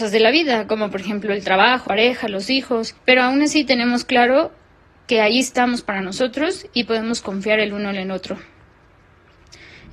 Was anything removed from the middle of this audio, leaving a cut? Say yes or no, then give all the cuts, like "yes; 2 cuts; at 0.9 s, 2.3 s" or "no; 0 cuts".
yes; 2 cuts; at 1.9 s, 3.0 s